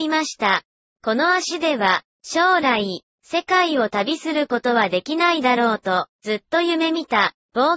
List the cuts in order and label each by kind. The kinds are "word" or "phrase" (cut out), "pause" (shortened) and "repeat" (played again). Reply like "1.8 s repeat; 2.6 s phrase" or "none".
6.1 s pause